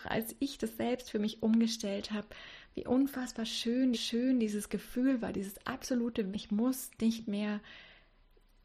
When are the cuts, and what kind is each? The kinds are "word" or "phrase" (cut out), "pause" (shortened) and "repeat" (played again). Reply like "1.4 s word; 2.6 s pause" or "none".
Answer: 3.9 s repeat; 6.3 s word